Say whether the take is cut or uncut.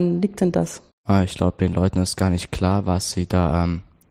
cut